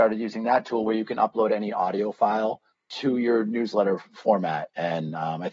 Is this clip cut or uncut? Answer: uncut